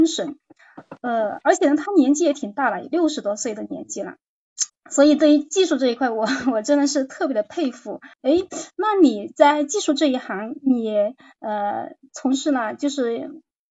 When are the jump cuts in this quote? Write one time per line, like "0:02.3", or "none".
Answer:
0:04.7
0:08.1